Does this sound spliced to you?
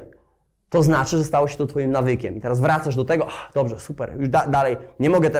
no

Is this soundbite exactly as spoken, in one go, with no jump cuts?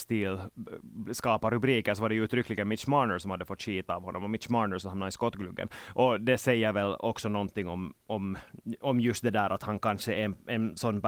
yes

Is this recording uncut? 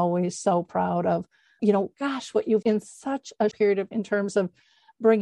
no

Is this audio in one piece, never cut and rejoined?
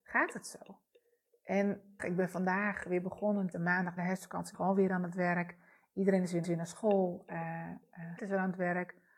no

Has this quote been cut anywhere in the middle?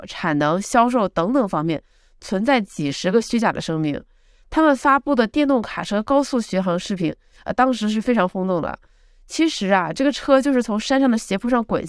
no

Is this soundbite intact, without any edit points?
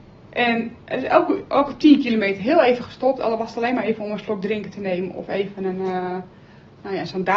yes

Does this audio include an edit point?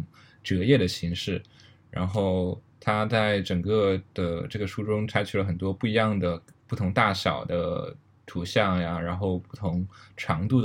no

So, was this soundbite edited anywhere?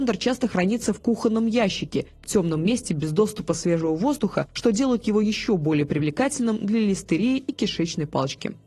no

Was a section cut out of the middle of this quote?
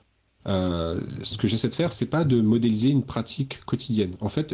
no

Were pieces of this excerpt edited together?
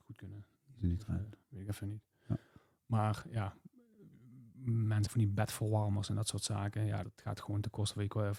yes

